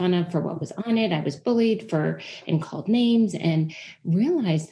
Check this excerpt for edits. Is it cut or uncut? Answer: uncut